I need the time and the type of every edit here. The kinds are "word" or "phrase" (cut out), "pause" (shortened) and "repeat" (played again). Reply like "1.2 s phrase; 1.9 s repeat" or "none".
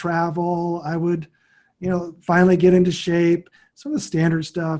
none